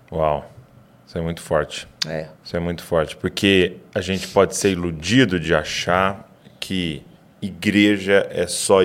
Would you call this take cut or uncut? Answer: cut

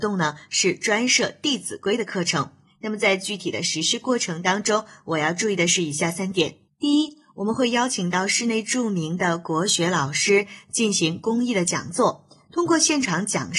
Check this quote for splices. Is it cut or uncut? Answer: cut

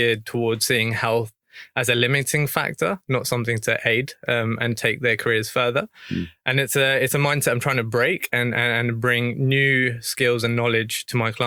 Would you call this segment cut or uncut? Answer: uncut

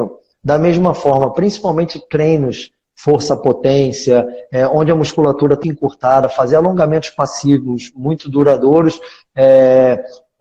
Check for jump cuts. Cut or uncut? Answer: cut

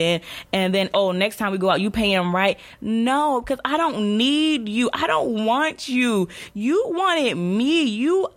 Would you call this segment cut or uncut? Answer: cut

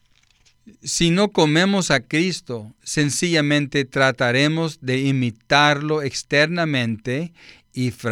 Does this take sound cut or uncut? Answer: uncut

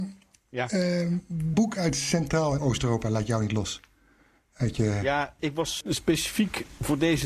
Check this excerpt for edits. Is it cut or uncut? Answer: cut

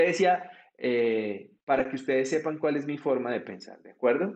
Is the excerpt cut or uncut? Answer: cut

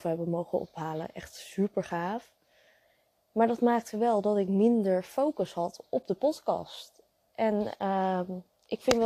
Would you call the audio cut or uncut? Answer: uncut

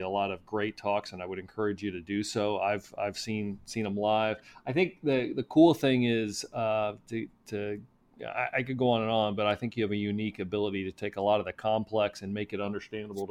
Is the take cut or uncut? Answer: uncut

